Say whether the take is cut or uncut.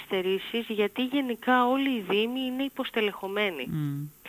uncut